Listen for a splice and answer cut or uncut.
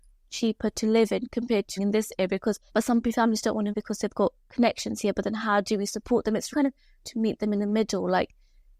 cut